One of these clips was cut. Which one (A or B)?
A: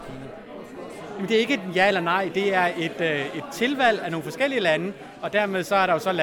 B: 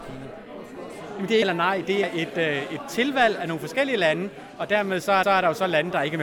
B